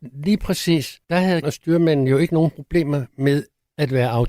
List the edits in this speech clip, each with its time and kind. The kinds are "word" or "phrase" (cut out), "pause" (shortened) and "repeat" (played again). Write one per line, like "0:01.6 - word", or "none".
0:01.0 - pause
0:01.4 - word